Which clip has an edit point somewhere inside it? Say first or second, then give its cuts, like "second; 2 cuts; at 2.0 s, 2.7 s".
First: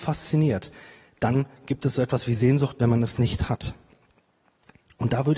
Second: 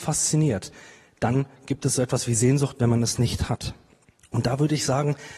second; 1 cut; at 4.0 s